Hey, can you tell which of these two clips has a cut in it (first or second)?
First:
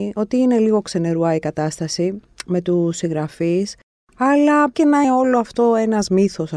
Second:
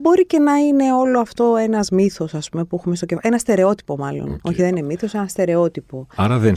first